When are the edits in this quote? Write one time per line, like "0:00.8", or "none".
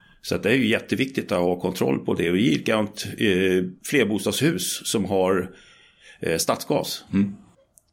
none